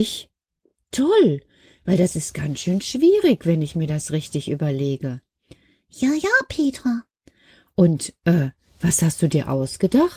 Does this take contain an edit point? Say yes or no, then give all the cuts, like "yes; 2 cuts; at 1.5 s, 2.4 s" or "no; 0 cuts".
no; 0 cuts